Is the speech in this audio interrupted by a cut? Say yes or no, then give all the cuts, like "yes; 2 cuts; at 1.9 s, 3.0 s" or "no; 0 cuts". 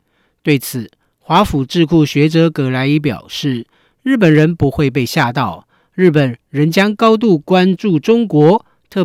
no; 0 cuts